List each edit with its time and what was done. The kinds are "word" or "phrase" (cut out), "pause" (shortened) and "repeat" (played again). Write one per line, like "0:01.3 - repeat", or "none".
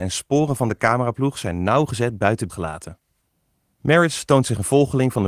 0:02.5 - word